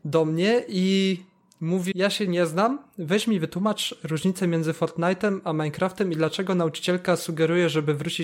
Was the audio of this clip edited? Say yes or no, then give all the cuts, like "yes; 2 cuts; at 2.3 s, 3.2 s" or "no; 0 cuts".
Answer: yes; 1 cut; at 1.9 s